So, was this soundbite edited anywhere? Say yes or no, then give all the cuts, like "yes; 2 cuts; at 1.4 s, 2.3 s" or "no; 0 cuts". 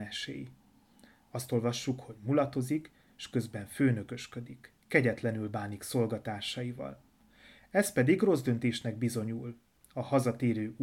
yes; 1 cut; at 4.8 s